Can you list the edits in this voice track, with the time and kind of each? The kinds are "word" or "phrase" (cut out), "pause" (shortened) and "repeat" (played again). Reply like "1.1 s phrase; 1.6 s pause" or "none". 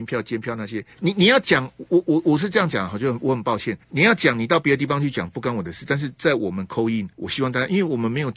0.9 s pause; 3.8 s pause; 7.1 s pause